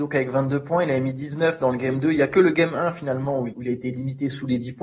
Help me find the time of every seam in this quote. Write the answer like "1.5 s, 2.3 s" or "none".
3.5 s